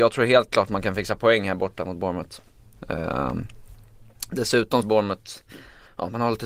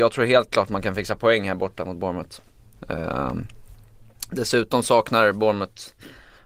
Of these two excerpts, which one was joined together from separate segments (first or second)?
first